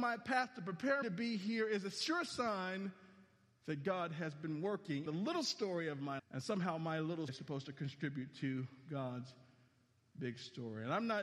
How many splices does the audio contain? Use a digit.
4